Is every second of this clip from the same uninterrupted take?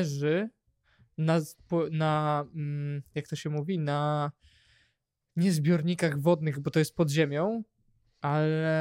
yes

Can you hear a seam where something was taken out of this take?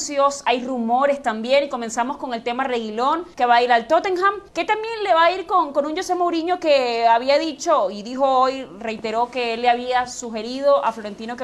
yes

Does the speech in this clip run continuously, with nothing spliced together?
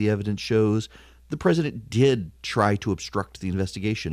yes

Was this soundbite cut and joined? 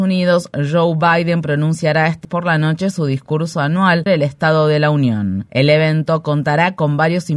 yes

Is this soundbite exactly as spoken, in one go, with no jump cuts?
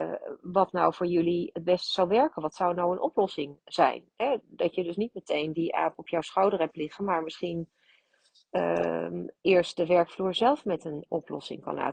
yes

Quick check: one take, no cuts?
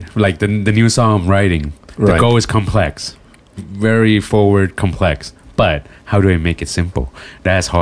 no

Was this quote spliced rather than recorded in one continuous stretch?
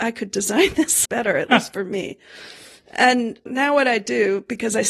yes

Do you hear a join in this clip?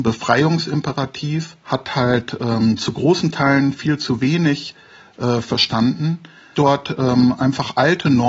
yes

